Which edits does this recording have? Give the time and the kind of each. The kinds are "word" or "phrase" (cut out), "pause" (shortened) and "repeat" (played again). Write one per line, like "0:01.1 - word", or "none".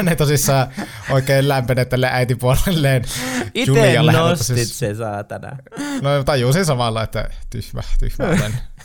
none